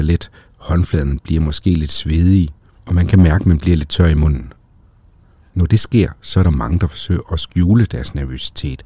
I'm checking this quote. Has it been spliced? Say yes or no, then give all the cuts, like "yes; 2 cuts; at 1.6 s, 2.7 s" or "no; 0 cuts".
no; 0 cuts